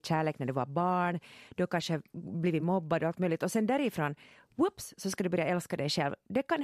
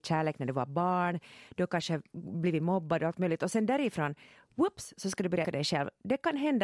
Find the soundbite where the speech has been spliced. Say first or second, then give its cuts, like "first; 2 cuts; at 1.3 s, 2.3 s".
second; 1 cut; at 5.4 s